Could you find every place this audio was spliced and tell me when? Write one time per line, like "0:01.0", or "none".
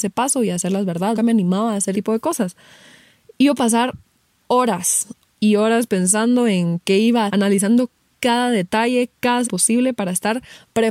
0:01.1
0:01.9
0:03.6
0:05.4
0:07.3
0:09.4